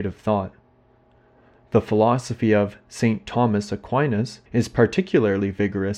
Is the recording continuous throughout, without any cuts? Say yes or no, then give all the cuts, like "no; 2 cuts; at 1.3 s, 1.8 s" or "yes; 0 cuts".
no; 1 cut; at 4.5 s